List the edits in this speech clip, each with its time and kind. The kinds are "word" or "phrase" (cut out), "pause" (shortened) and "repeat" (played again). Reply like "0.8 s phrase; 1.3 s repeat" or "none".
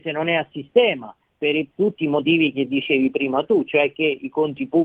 none